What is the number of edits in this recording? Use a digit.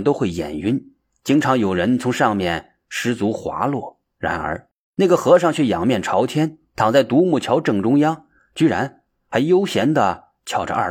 1